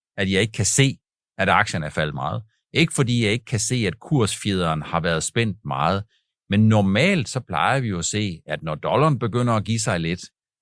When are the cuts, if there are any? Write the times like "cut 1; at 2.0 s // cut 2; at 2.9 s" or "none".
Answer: none